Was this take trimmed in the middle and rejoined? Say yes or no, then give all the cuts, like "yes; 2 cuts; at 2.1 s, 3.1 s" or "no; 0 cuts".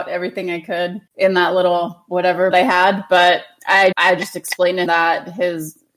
yes; 4 cuts; at 1.1 s, 2.5 s, 3.9 s, 4.9 s